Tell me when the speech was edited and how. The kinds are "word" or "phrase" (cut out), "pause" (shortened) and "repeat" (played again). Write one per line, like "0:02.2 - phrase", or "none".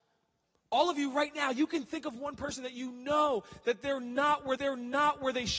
0:04.6 - repeat